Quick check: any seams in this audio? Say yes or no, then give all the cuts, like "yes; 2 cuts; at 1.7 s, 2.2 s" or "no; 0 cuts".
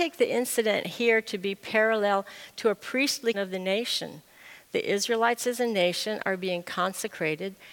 yes; 1 cut; at 3.3 s